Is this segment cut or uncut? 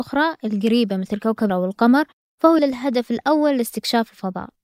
cut